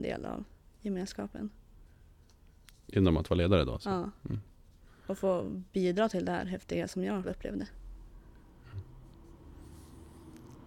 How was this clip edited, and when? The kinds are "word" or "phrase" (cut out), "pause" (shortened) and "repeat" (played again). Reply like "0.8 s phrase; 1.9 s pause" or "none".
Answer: 7.2 s word